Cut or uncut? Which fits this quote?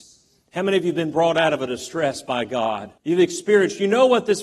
cut